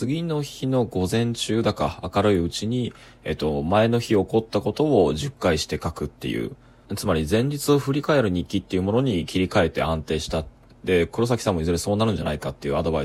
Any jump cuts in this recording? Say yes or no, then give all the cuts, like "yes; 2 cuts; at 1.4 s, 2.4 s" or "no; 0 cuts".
no; 0 cuts